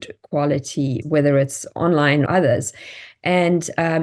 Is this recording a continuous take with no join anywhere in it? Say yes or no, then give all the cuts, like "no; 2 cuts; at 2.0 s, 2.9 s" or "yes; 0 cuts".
no; 2 cuts; at 1.0 s, 2.3 s